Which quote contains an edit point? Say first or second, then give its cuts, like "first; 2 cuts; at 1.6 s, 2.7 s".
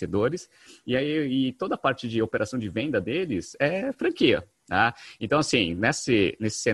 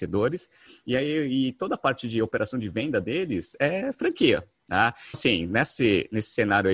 second; 1 cut; at 5.1 s